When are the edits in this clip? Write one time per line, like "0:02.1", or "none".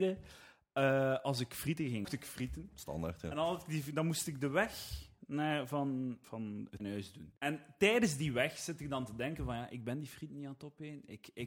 0:02.0
0:06.2
0:06.8
0:07.4